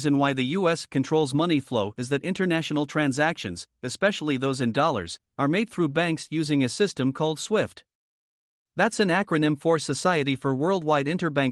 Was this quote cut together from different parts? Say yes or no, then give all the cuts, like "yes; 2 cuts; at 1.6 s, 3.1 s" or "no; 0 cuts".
no; 0 cuts